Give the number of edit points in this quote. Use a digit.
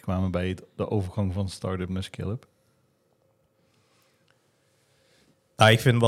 0